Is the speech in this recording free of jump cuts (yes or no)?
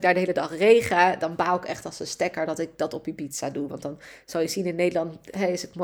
yes